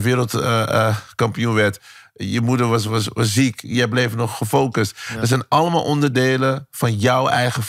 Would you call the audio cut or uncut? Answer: uncut